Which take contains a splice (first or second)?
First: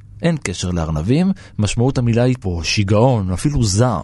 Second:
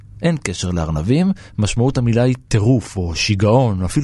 first